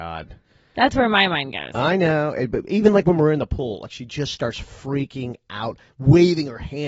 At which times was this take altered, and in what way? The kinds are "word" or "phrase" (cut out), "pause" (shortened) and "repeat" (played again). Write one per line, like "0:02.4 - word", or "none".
none